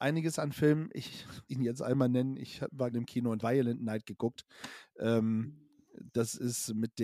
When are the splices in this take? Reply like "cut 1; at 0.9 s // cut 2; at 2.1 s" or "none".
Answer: cut 1; at 1.5 s // cut 2; at 2.9 s // cut 3; at 3.4 s